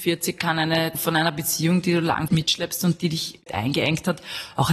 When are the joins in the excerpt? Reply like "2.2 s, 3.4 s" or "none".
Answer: 0.9 s, 2.3 s, 3.5 s